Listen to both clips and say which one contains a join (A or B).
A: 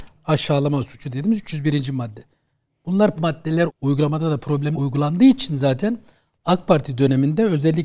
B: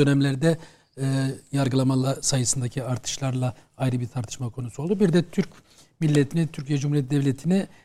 A